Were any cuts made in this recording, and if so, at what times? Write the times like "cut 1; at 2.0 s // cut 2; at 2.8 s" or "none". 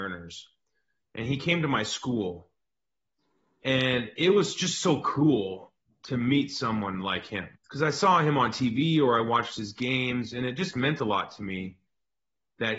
cut 1; at 5.8 s // cut 2; at 7.6 s